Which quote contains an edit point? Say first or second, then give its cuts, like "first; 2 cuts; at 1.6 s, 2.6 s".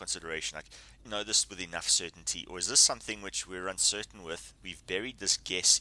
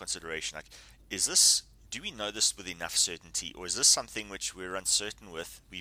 first; 1 cut; at 1.0 s